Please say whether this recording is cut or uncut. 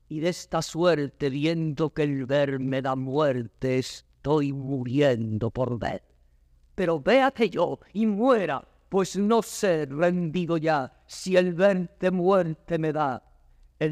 uncut